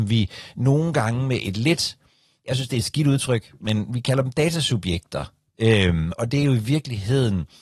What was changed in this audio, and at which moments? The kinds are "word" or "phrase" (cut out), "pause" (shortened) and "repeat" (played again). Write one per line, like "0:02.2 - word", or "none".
0:06.2 - word